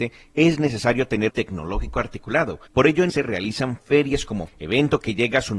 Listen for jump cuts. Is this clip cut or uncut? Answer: cut